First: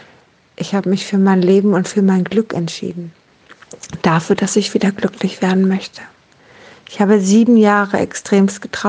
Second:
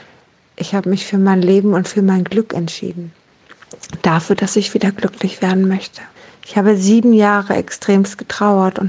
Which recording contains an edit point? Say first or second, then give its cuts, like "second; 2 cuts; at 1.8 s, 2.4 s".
second; 1 cut; at 6.2 s